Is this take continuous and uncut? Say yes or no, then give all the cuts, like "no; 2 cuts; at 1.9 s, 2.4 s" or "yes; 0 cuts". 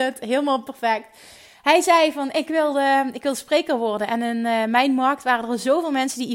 yes; 0 cuts